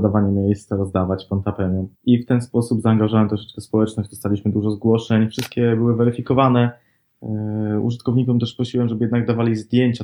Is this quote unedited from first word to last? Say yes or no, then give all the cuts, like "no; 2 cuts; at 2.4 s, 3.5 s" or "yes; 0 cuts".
no; 1 cut; at 1.9 s